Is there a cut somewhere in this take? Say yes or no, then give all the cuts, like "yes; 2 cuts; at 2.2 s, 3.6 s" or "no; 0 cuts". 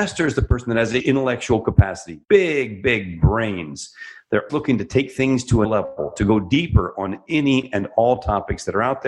yes; 4 cuts; at 1.0 s, 2.2 s, 4.5 s, 5.6 s